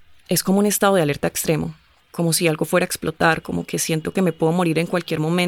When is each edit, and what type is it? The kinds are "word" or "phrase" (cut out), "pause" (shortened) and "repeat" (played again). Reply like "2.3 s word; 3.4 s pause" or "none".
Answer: none